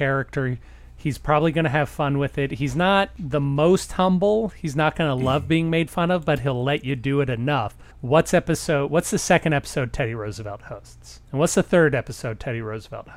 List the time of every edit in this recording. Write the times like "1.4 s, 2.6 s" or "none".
7.9 s

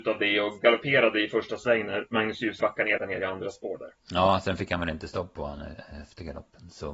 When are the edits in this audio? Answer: 2.6 s, 3.0 s, 4.0 s

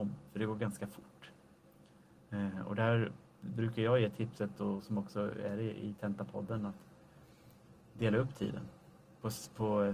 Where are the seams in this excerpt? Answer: none

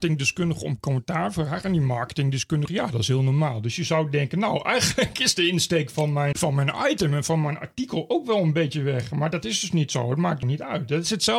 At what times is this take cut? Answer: 2.7 s, 6.3 s, 10.4 s

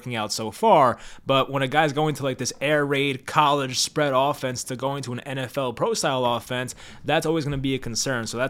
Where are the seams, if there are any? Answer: none

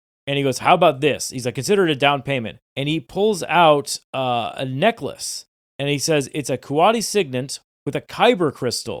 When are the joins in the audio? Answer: 2.7 s, 5.5 s

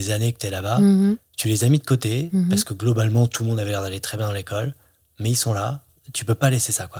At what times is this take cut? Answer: none

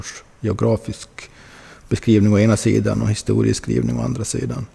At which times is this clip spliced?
none

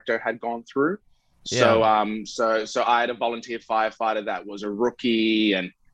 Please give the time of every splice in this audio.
none

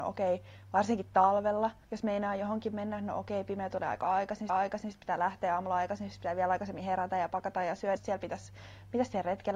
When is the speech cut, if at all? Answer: 1.8 s, 4.5 s, 8.0 s

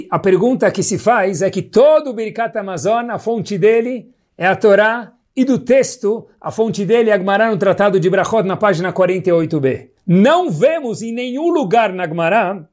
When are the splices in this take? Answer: 10.0 s

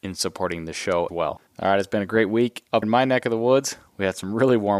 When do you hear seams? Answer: 1.1 s, 2.8 s

